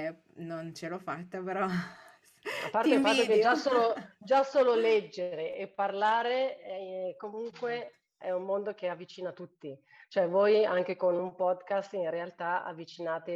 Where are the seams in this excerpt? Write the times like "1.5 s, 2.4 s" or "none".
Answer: none